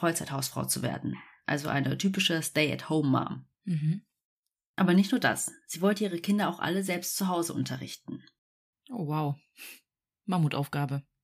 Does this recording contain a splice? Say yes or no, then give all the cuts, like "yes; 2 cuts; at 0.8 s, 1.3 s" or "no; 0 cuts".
yes; 1 cut; at 3.5 s